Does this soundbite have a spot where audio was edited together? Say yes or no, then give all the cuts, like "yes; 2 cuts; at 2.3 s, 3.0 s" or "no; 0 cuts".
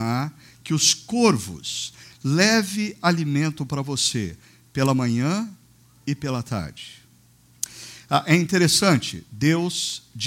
no; 0 cuts